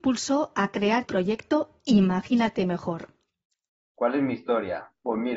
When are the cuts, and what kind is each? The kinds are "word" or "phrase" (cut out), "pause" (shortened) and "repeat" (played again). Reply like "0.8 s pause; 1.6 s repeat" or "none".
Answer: 1.1 s word; 3.5 s pause